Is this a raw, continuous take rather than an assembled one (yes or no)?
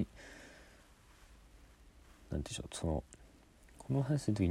yes